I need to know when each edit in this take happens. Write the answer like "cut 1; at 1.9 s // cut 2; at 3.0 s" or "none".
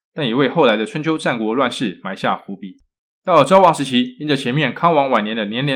cut 1; at 3.1 s